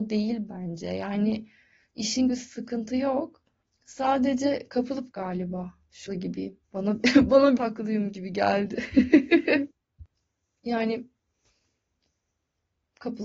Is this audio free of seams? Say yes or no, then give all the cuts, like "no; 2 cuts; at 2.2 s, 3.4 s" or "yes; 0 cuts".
no; 7 cuts; at 2.3 s, 3.6 s, 5.1 s, 6.1 s, 6.6 s, 7.6 s, 9.7 s